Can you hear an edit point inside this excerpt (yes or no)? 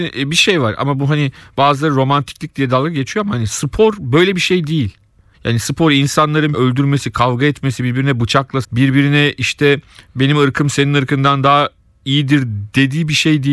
yes